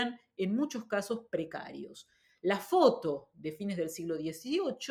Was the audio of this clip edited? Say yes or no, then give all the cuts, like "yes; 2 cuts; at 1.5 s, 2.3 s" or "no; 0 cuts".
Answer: no; 0 cuts